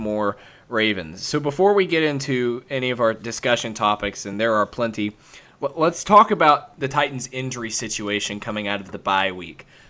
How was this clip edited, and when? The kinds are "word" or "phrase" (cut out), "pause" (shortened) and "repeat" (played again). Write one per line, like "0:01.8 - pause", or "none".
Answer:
none